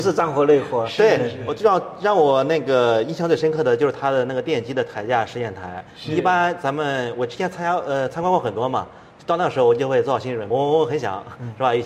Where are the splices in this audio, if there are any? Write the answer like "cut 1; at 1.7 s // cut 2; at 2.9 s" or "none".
cut 1; at 10.5 s